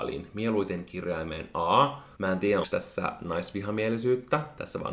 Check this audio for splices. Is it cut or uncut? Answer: cut